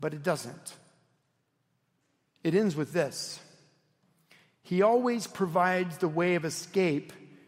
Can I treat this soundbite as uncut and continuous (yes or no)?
yes